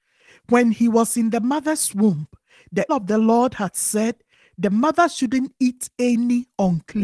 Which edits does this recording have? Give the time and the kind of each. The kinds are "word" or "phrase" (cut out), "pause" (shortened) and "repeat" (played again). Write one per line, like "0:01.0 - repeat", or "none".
0:02.9 - word